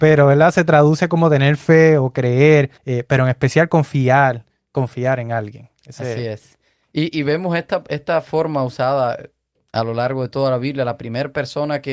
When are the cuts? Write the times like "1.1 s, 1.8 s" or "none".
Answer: 2.8 s